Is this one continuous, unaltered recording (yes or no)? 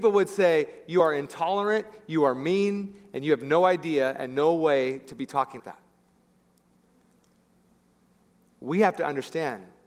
no